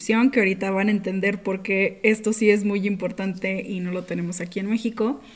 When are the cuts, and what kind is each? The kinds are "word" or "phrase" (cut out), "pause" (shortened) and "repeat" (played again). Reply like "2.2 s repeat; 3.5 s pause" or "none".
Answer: none